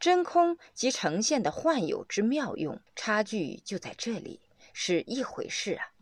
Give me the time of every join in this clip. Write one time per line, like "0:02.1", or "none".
0:02.9